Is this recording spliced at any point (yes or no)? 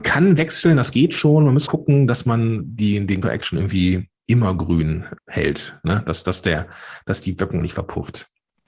yes